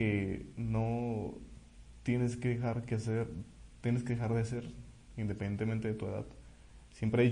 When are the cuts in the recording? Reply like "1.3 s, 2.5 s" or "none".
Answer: none

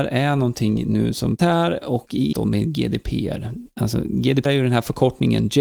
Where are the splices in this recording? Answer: 1.4 s, 2.3 s, 4.4 s

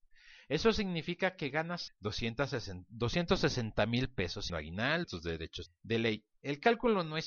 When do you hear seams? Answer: 1.9 s, 4.5 s, 5.0 s, 5.7 s

